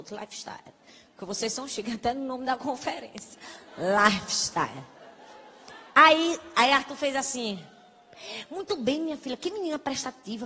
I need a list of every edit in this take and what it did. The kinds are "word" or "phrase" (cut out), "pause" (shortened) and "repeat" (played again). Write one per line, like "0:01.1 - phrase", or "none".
0:05.9 - pause